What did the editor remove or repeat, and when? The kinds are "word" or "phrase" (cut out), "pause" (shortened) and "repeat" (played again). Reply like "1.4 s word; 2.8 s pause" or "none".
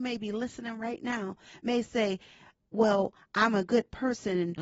none